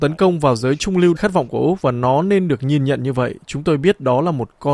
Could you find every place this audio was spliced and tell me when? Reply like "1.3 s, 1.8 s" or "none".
1.2 s